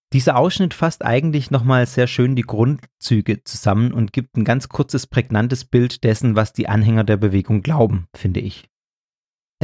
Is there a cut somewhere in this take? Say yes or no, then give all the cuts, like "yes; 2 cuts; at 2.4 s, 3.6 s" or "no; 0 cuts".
no; 0 cuts